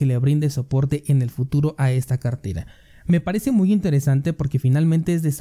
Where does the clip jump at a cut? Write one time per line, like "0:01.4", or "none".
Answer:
none